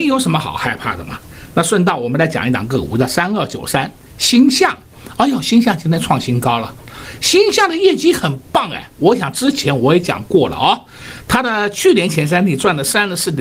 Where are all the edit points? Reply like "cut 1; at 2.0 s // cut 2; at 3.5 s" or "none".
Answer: none

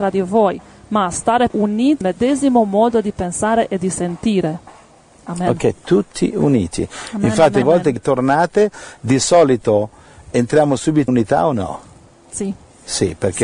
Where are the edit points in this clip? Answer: cut 1; at 1.5 s // cut 2; at 2.0 s // cut 3; at 7.6 s // cut 4; at 8.0 s // cut 5; at 10.3 s // cut 6; at 11.1 s

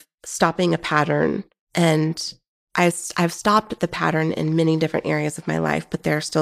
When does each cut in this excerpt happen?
none

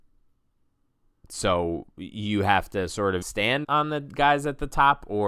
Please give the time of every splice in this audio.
cut 1; at 3.2 s // cut 2; at 3.6 s

